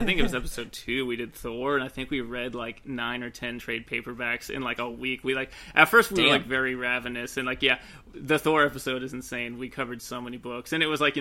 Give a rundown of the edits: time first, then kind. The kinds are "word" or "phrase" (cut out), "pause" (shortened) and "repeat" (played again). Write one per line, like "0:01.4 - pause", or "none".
none